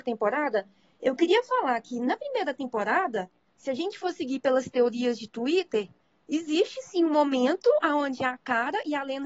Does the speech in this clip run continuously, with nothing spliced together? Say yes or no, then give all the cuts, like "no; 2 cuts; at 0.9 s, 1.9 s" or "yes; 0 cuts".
yes; 0 cuts